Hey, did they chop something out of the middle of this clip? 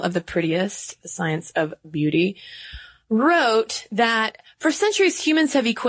no; 0 cuts

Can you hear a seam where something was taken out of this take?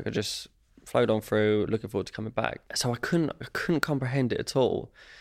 yes; 1 cut; at 2.7 s

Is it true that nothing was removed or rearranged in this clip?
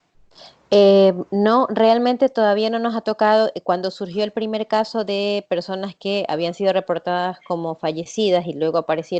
yes; 0 cuts

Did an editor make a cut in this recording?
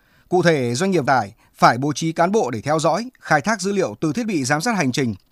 yes; 1 cut; at 1.0 s

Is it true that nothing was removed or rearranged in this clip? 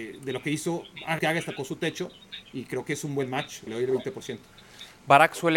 no; 3 cuts; at 1.2 s, 1.6 s, 3.7 s

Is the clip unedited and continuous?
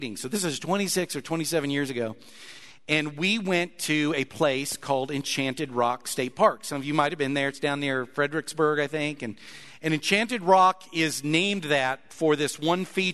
yes; 0 cuts

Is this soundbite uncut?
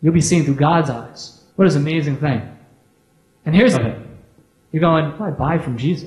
no; 3 cuts; at 1.5 s, 3.7 s, 5.2 s

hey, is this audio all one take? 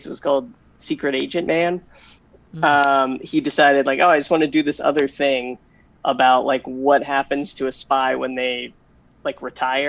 yes; 0 cuts

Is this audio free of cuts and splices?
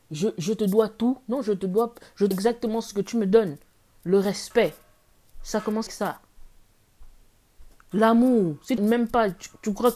no; 3 cuts; at 2.3 s, 5.9 s, 8.8 s

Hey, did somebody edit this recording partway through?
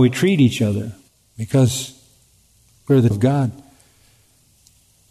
yes; 2 cuts; at 1.1 s, 3.1 s

